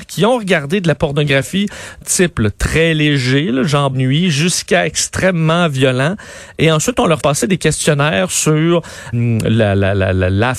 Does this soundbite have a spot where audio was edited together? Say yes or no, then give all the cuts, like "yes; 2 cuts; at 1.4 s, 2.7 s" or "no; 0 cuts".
yes; 4 cuts; at 2.0 s, 3.9 s, 7.2 s, 9.1 s